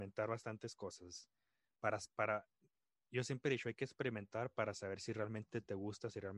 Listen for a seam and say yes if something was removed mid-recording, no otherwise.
no